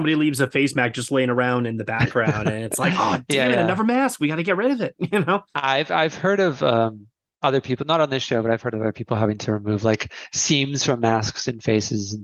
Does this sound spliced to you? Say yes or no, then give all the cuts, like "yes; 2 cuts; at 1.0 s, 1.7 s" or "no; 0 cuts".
no; 0 cuts